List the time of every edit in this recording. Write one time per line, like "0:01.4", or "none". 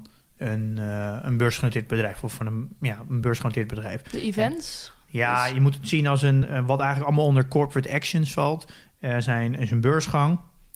none